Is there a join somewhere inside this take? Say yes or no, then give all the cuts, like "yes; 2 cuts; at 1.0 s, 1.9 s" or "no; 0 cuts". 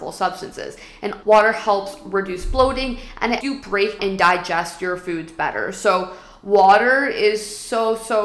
yes; 3 cuts; at 1.2 s, 3.4 s, 4.0 s